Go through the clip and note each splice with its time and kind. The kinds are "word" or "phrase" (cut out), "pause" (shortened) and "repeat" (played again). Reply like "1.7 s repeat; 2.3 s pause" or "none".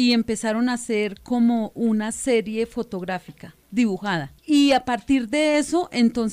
4.4 s pause